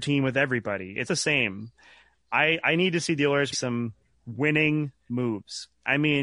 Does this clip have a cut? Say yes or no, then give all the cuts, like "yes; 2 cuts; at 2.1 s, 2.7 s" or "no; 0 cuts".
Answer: yes; 2 cuts; at 1.1 s, 3.5 s